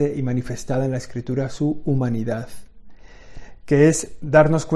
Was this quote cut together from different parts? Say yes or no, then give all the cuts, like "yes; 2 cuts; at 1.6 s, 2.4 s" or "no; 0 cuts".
no; 0 cuts